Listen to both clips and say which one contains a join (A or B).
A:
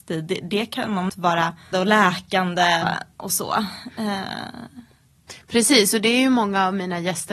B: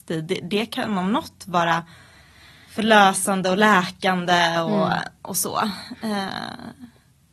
A